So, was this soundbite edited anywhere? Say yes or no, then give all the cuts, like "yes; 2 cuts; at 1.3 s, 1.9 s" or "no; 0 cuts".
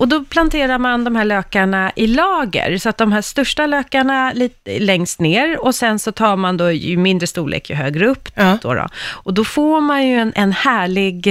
no; 0 cuts